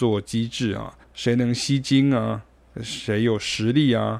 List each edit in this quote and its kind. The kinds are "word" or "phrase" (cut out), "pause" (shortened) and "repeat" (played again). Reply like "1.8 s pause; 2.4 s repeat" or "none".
1.0 s pause